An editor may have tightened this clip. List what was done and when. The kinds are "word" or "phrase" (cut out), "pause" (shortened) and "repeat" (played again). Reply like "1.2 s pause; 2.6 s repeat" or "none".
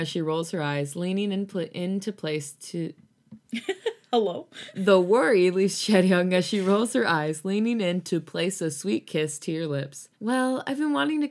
3.4 s pause; 10.1 s pause